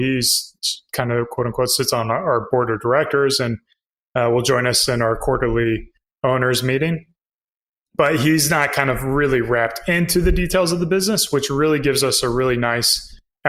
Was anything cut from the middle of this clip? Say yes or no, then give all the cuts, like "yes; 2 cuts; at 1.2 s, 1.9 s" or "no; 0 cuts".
no; 0 cuts